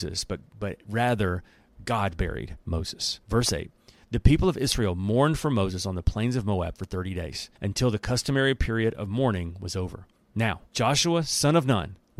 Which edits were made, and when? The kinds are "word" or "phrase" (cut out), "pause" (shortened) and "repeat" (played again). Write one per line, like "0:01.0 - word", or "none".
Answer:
0:03.2 - pause
0:07.6 - pause
0:10.7 - pause